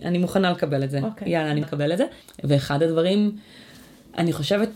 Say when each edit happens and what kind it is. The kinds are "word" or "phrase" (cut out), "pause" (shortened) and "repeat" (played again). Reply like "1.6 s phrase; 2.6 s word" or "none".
1.6 s word